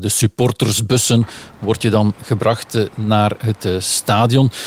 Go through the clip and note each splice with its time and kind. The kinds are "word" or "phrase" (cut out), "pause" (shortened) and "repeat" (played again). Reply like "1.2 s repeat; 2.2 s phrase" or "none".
none